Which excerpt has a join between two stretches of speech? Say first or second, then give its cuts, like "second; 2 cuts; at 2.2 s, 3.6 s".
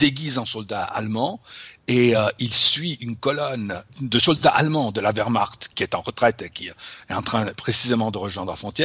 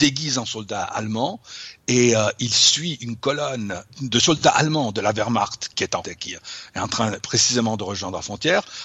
second; 1 cut; at 6.0 s